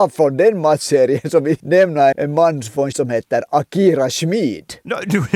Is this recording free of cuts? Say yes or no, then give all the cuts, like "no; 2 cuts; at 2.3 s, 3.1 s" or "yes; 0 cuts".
no; 3 cuts; at 1.6 s, 2.1 s, 2.9 s